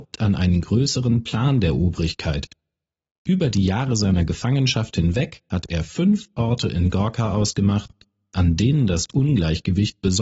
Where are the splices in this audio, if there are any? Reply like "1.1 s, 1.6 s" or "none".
none